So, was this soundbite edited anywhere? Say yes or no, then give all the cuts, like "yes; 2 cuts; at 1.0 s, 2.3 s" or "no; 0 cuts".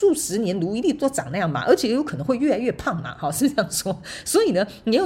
no; 0 cuts